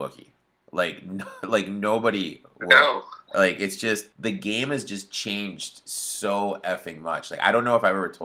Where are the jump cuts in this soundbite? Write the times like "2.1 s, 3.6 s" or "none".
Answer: 4.1 s